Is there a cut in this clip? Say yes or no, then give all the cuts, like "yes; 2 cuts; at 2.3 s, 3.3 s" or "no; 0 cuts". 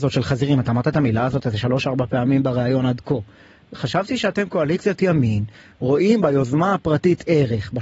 no; 0 cuts